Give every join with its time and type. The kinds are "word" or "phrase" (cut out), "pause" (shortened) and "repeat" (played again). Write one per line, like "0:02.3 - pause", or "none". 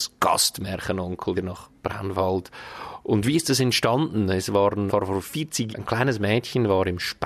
0:01.3 - word
0:04.9 - word
0:05.7 - word